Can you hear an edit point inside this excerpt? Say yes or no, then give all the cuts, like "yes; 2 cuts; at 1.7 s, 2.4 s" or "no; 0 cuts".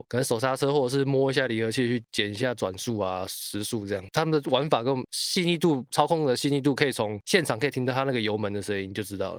no; 0 cuts